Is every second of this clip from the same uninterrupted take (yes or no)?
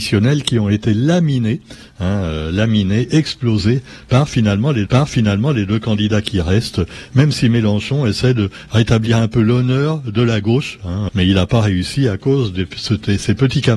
no